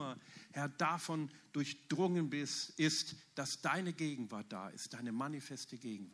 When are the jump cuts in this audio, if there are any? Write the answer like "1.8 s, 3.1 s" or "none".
none